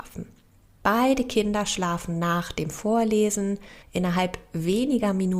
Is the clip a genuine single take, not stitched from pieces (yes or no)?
no